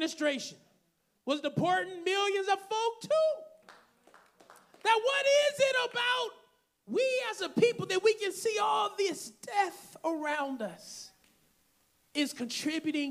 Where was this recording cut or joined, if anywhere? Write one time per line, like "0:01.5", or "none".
none